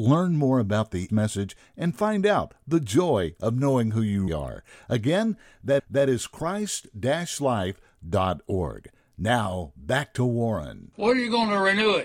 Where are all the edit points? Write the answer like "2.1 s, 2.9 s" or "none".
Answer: 1.1 s, 4.3 s, 5.8 s